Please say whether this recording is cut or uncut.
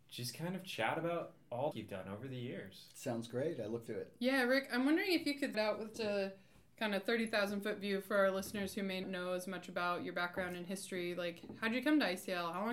cut